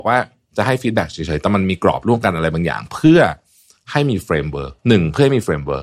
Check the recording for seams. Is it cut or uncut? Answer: cut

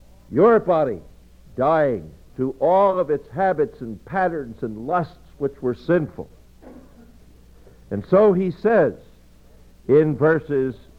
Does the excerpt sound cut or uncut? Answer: uncut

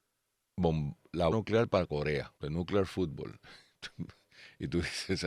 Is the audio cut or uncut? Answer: cut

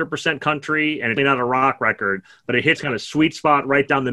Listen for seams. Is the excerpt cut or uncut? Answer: cut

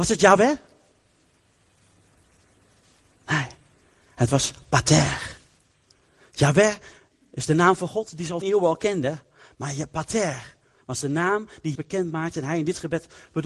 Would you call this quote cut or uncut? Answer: cut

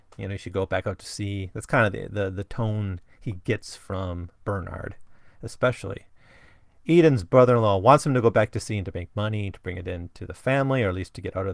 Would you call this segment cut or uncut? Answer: uncut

